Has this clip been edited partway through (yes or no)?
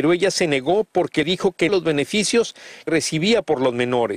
yes